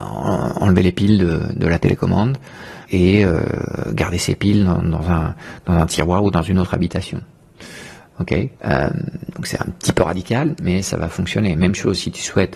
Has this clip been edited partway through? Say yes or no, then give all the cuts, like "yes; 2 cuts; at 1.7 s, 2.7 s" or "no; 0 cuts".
yes; 2 cuts; at 2.8 s, 8.6 s